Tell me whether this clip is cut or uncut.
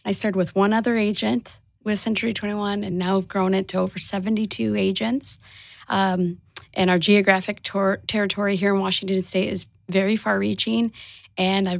uncut